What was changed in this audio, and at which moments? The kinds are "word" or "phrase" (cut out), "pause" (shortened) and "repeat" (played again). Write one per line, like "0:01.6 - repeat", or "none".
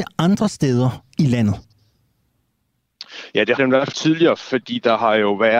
0:03.6 - word
0:03.9 - phrase

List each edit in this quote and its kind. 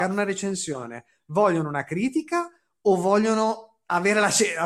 none

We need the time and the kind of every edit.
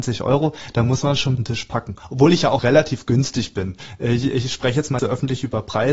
0:01.4 - phrase
0:02.6 - word
0:05.0 - word

